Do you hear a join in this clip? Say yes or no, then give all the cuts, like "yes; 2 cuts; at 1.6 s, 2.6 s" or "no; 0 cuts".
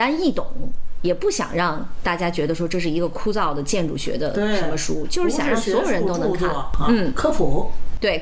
no; 0 cuts